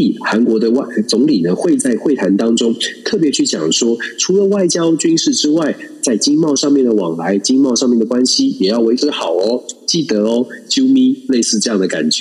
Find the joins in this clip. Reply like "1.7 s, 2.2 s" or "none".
none